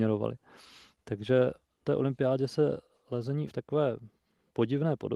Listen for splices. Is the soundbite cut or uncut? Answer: cut